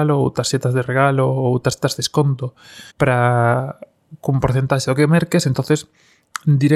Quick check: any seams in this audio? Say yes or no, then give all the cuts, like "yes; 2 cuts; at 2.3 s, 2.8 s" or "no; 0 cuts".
yes; 1 cut; at 2.9 s